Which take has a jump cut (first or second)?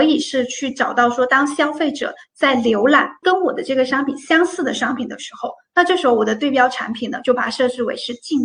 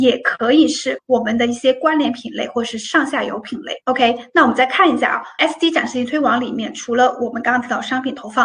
second